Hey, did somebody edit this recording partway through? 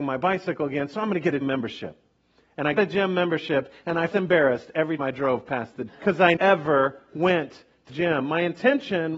yes; 7 cuts; at 1.4 s, 2.8 s, 4.1 s, 5.0 s, 5.9 s, 6.4 s, 7.9 s

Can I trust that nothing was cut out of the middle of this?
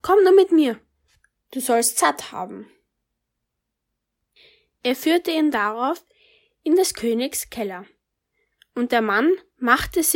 yes; 0 cuts

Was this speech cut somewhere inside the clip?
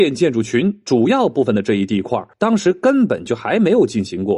yes; 1 cut; at 2.3 s

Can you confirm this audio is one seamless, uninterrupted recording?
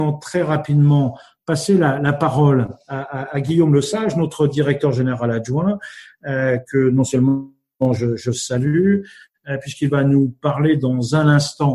yes; 0 cuts

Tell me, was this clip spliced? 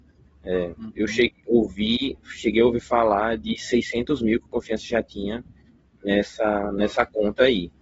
no; 0 cuts

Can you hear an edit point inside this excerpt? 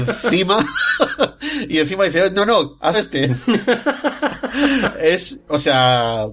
yes; 1 cut; at 2.9 s

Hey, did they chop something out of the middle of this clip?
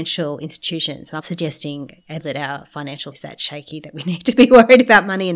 yes; 3 cuts; at 1.2 s, 2.2 s, 3.1 s

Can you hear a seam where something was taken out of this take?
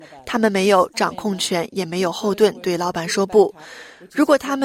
no; 0 cuts

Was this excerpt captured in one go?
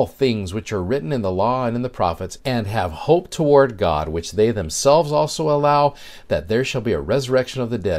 yes; 0 cuts

